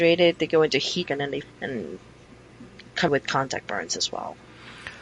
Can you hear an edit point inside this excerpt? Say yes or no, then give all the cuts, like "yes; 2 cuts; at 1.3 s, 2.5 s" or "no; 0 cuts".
yes; 3 cuts; at 1.0 s, 1.4 s, 3.1 s